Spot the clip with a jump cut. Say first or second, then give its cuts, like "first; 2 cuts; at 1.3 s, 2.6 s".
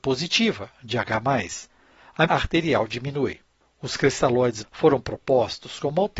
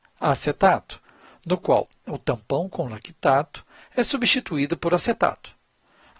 first; 2 cuts; at 2.3 s, 4.6 s